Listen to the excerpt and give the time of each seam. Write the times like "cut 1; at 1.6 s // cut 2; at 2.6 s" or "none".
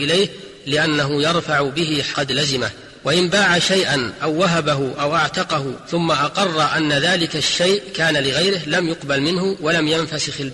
cut 1; at 2.1 s